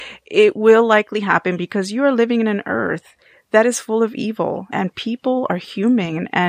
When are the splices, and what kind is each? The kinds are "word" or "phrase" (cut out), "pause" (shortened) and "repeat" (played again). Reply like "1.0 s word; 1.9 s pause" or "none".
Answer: 4.7 s word

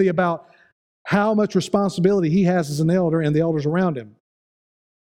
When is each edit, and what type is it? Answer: none

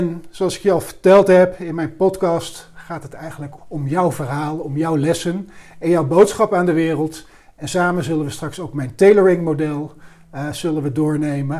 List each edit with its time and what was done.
3.6 s word

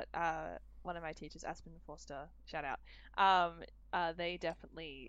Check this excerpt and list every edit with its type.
3.8 s pause

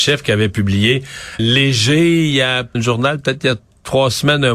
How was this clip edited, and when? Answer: 1.4 s word; 2.7 s word

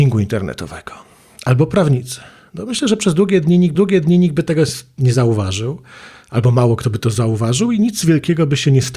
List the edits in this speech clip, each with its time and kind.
3.8 s repeat

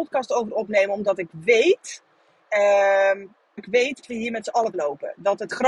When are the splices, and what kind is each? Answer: 3.6 s word; 4.0 s word; 4.7 s word

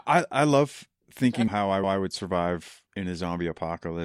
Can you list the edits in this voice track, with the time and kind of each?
1.5 s word; 1.8 s repeat; 2.9 s pause

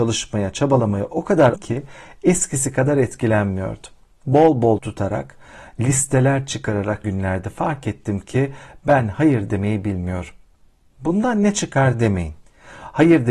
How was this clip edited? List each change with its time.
1.5 s word; 4.8 s word; 7.0 s word

